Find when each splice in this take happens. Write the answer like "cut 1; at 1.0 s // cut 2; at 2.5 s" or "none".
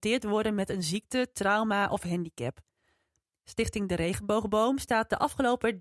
none